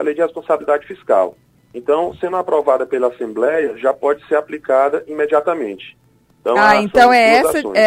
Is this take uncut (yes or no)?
yes